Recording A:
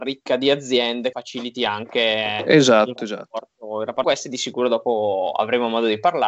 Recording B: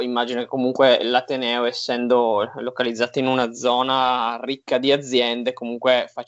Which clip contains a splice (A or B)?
A